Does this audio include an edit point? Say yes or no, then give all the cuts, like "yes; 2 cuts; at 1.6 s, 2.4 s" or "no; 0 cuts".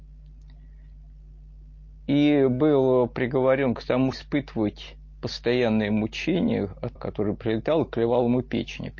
yes; 2 cuts; at 4.1 s, 7.0 s